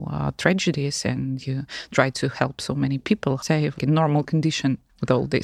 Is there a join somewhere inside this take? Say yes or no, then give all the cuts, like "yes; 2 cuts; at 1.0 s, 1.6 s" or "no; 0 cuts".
yes; 2 cuts; at 3.4 s, 3.8 s